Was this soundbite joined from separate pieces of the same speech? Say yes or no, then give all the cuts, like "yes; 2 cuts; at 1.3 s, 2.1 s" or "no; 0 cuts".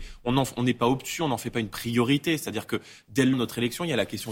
yes; 1 cut; at 3.3 s